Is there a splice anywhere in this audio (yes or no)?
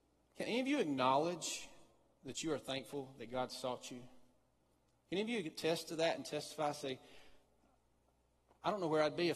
no